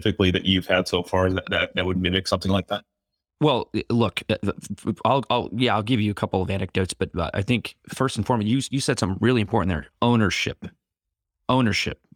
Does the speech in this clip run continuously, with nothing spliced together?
yes; 0 cuts

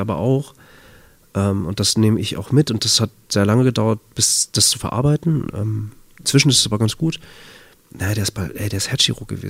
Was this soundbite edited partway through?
no; 0 cuts

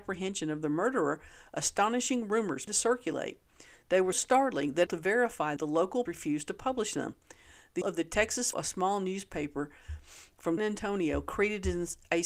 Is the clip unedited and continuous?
no; 8 cuts; at 2.7 s, 4.1 s, 4.9 s, 5.6 s, 6.1 s, 7.8 s, 8.5 s, 10.6 s

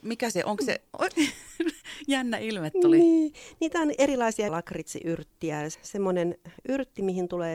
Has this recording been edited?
yes; 2 cuts; at 4.5 s, 5.7 s

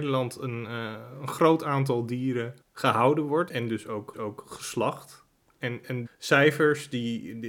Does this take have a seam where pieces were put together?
yes; 4 cuts; at 2.6 s, 3.5 s, 4.1 s, 6.1 s

